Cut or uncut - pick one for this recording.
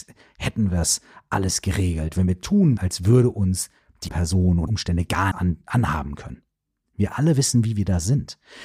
cut